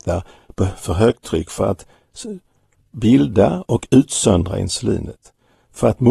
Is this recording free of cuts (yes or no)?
yes